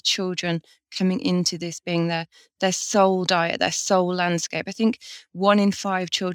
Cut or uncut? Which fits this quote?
uncut